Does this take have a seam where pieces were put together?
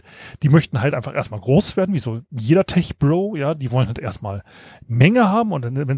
no; 0 cuts

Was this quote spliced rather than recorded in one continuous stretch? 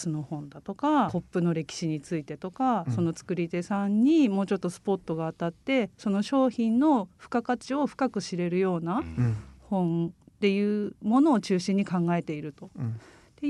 yes; 1 cut; at 1.1 s

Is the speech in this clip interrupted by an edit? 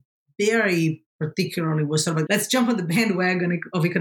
yes; 1 cut; at 2.3 s

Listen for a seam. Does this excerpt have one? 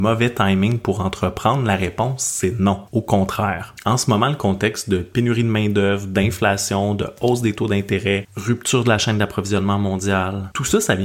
no; 0 cuts

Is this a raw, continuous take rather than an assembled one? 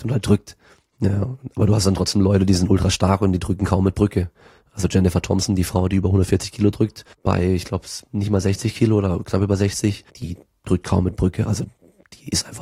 no; 2 cuts; at 7.1 s, 10.1 s

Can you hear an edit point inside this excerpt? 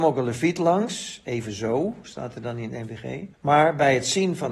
yes; 1 cut; at 3.3 s

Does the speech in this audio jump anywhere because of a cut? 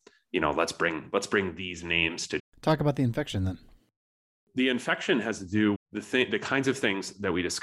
yes; 2 cuts; at 2.4 s, 5.8 s

